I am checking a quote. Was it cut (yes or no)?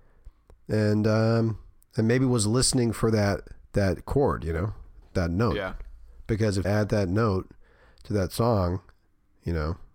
yes